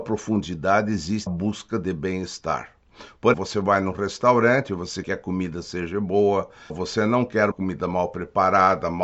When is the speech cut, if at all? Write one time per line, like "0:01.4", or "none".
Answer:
0:01.3
0:03.3
0:05.0
0:06.7
0:07.5